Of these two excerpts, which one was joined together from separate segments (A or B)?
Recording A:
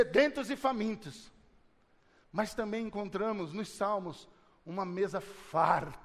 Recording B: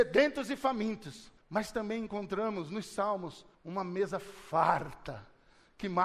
B